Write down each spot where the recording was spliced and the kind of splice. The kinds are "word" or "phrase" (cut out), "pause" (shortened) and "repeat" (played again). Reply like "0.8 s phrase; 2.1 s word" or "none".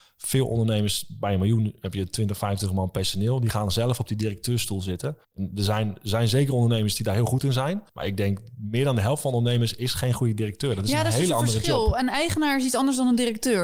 5.2 s pause; 7.9 s pause